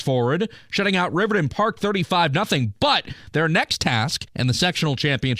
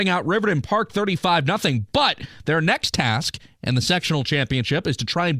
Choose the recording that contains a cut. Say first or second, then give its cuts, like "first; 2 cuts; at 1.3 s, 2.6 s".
first; 1 cut; at 4.3 s